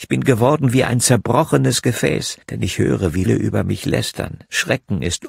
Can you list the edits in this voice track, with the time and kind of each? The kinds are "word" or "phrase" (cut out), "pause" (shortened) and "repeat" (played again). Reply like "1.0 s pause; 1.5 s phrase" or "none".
2.4 s pause; 3.3 s word